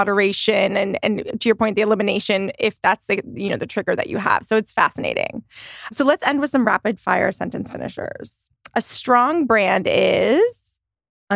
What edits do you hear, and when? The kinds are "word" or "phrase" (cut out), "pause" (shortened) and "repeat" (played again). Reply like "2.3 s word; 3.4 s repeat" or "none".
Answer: none